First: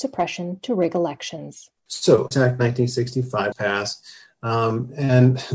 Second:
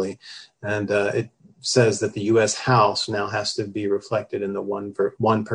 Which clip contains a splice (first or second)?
first